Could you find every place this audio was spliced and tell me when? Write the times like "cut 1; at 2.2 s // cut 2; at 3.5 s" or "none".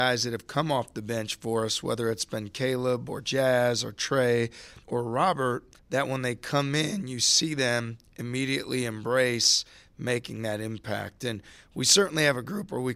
cut 1; at 4.8 s // cut 2; at 5.8 s